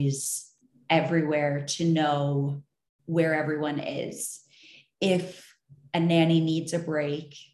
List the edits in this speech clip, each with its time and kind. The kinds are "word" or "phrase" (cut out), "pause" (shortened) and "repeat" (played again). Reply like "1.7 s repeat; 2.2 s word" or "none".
none